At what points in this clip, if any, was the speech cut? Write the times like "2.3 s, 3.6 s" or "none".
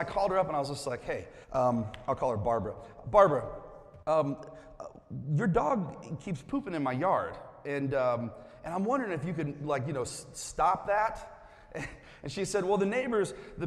1.4 s, 4.0 s